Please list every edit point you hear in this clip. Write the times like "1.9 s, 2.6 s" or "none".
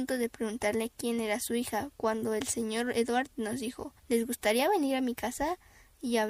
4.0 s

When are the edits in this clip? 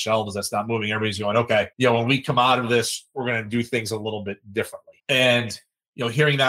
1.7 s, 5.0 s

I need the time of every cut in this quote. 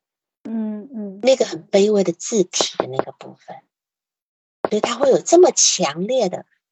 none

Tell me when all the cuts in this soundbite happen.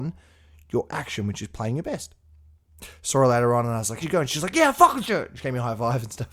4.0 s, 5.0 s

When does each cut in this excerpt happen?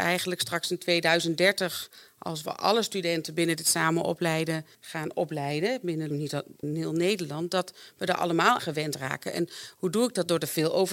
4.7 s, 6.1 s, 6.6 s, 8.6 s

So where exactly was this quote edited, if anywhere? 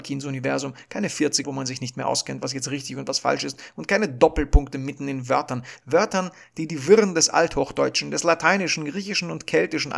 1.4 s

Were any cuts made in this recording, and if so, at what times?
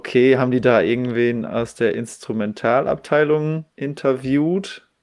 3.7 s

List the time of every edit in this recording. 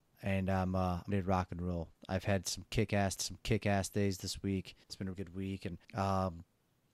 1.1 s, 3.2 s, 4.8 s, 5.1 s, 5.8 s

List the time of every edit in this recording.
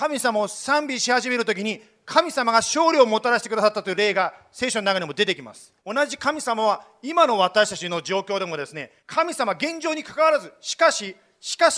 5.8 s, 9.0 s

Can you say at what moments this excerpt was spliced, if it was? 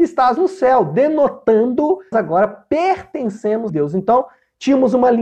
2.1 s, 3.7 s

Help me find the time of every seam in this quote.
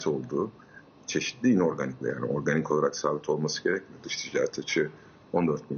2.0 s

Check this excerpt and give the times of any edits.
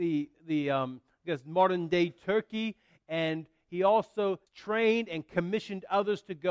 4.5 s

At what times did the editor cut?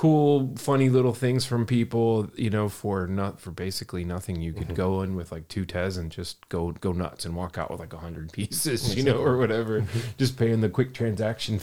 none

